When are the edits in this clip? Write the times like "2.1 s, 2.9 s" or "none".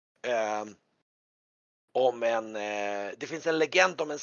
none